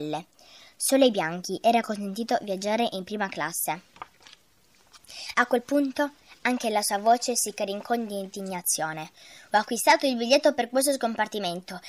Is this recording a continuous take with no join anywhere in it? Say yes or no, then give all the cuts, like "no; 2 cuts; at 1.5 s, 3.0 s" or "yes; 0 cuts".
yes; 0 cuts